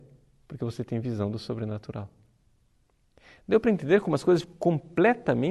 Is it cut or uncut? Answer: cut